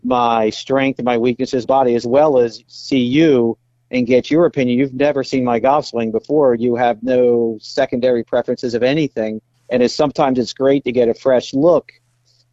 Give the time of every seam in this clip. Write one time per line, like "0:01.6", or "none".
0:01.6
0:02.6
0:09.5